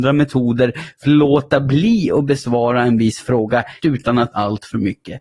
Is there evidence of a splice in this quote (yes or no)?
yes